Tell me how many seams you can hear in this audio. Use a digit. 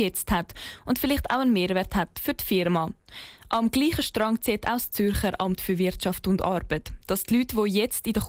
0